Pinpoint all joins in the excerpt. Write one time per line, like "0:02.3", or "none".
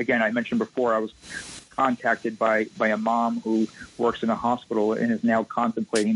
0:02.7